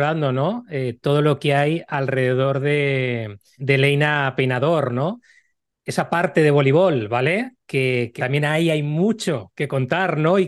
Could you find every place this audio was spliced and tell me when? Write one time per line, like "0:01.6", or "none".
0:03.6
0:08.2